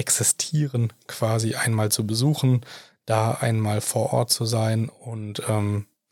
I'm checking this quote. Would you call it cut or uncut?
uncut